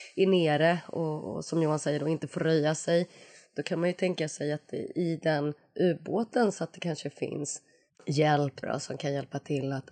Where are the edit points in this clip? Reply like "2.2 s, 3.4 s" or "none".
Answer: 8.6 s